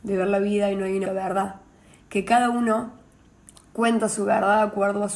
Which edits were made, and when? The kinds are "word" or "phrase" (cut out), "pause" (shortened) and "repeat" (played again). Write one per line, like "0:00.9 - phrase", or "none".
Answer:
0:01.1 - word